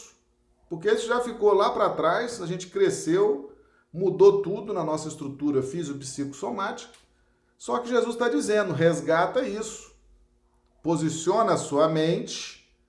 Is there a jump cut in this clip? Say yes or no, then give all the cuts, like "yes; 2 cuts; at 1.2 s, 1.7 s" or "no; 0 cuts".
no; 0 cuts